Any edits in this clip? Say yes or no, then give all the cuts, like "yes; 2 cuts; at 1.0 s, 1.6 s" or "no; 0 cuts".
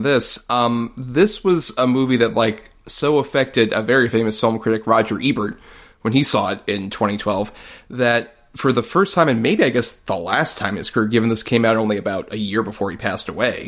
no; 0 cuts